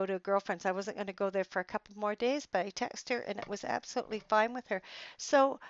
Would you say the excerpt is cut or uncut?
uncut